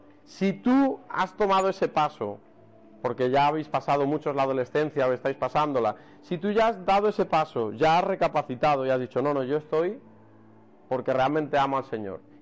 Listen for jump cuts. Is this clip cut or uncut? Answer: uncut